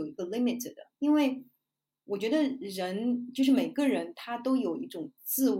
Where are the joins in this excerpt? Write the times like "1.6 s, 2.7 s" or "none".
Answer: 0.9 s